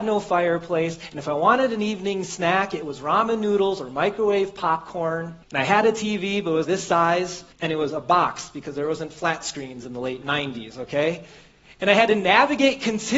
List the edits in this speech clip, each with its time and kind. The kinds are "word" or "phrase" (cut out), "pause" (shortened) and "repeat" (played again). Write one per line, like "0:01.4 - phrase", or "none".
0:05.4 - pause
0:06.6 - word
0:07.5 - pause